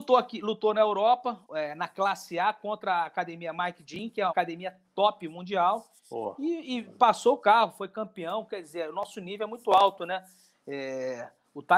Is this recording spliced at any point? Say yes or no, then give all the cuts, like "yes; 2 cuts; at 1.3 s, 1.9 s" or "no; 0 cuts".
yes; 2 cuts; at 1.4 s, 4.3 s